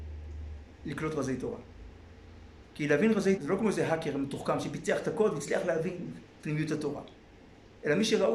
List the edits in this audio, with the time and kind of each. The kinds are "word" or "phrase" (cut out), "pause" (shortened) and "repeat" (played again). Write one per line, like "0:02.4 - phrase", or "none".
0:03.4 - word
0:06.4 - word

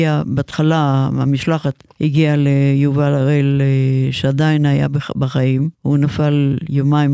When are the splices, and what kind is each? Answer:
0:01.9 - pause
0:05.7 - pause

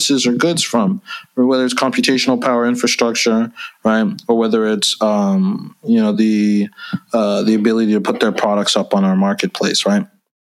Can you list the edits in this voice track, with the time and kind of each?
none

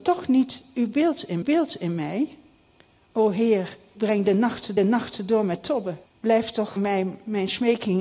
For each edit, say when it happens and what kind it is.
0:01.4 - repeat
0:03.9 - word
0:04.8 - repeat
0:06.1 - pause
0:06.8 - word

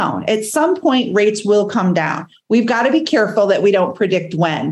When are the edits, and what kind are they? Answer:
none

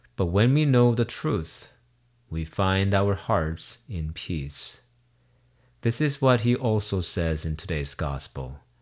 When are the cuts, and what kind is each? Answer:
none

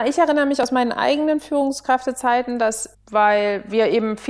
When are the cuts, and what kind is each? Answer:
0:02.9 - word

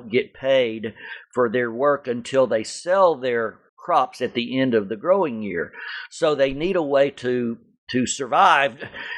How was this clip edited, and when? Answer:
0:03.7 - pause

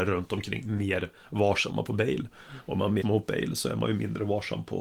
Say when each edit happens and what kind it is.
0:03.0 - word

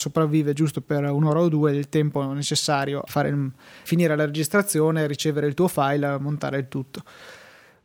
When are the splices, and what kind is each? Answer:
0:03.1 - word
0:03.9 - word

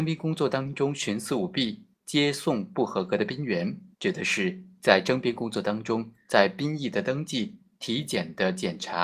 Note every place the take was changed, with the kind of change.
0:03.9 - pause

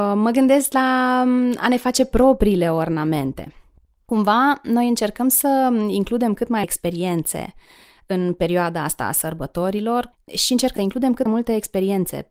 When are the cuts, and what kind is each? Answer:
0:06.6 - word
0:10.8 - word
0:11.3 - word

